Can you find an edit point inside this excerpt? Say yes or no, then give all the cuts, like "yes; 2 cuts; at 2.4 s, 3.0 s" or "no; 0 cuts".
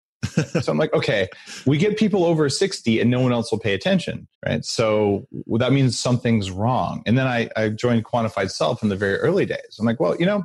yes; 1 cut; at 4.3 s